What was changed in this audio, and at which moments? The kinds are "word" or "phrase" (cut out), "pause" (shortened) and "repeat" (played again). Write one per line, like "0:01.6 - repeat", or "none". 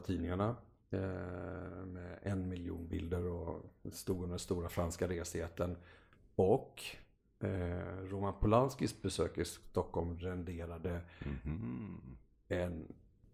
none